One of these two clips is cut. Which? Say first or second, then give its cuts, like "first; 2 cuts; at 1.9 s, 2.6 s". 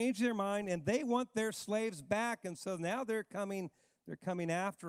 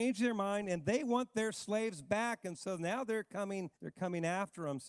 second; 1 cut; at 3.8 s